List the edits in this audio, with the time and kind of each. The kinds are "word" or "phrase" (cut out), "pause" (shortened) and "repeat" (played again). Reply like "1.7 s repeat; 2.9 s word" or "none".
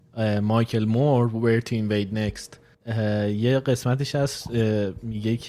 2.7 s pause